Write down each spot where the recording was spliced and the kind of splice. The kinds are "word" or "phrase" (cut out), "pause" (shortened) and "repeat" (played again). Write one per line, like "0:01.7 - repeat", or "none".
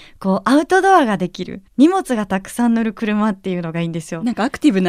0:01.7 - pause